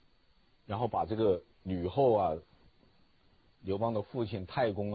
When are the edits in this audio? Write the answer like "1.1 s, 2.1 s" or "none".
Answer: 1.5 s